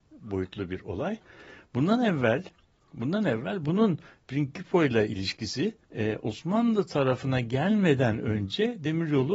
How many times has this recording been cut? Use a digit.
1